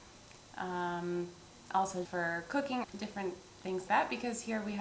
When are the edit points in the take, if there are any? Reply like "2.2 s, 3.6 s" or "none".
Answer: 2.0 s, 2.8 s, 3.9 s